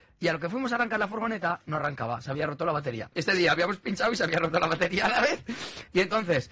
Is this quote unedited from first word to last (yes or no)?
no